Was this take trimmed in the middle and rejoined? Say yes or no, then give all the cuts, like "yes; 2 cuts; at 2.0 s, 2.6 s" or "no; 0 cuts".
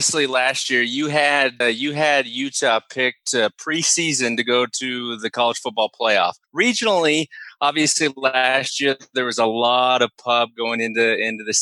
yes; 2 cuts; at 1.6 s, 6.4 s